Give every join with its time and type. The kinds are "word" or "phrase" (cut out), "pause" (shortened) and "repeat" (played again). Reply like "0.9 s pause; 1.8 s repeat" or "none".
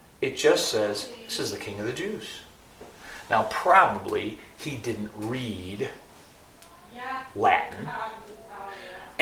none